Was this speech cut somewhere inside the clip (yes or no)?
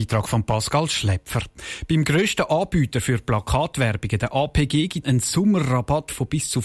yes